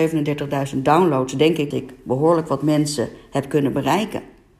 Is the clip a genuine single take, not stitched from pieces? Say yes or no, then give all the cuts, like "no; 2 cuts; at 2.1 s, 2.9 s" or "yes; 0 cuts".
no; 1 cut; at 1.7 s